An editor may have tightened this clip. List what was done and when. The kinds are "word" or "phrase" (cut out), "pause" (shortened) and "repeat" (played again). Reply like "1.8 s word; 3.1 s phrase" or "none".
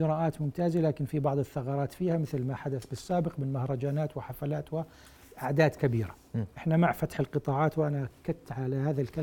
none